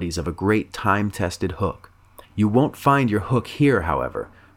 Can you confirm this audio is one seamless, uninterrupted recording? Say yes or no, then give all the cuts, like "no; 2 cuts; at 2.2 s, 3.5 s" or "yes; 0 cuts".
no; 1 cut; at 2.2 s